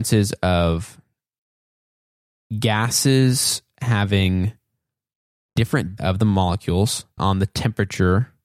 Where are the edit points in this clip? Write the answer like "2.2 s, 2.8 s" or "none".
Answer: 6.0 s, 7.2 s